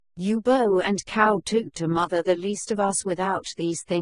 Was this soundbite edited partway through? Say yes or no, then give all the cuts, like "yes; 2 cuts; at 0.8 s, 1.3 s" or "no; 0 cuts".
no; 0 cuts